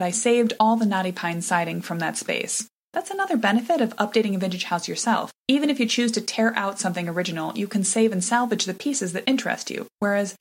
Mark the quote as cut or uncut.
cut